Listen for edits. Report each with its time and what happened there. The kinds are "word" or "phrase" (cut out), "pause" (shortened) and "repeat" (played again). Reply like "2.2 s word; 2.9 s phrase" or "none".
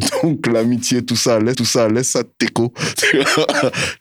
1.5 s repeat